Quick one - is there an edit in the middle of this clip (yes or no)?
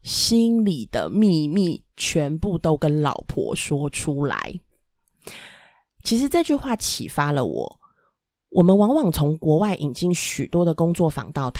no